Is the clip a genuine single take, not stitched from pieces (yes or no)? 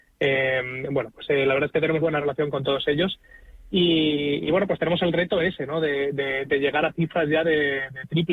no